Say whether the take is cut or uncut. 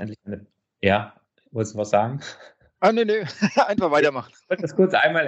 uncut